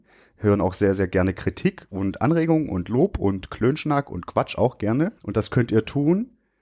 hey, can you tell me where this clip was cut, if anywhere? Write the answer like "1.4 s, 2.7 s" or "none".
5.2 s